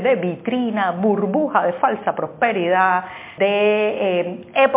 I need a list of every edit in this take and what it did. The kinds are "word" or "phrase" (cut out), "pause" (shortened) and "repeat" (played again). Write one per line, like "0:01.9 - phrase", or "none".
0:03.4 - word